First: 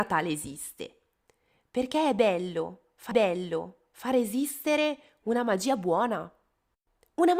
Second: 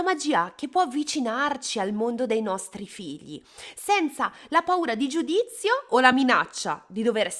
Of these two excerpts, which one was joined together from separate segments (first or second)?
first